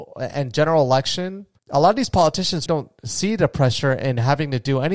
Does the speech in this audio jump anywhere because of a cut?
yes; 2 cuts; at 1.6 s, 2.7 s

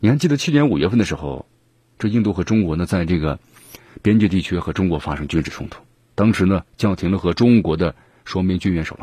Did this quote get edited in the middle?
no; 0 cuts

